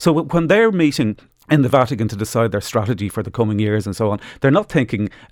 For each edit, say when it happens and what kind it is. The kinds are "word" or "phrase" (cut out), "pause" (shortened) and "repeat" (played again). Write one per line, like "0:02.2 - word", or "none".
0:01.3 - pause